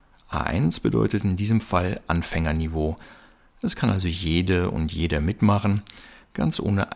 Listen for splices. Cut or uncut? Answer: uncut